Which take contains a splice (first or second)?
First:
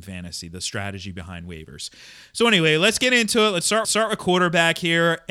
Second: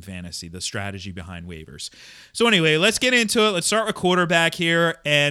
first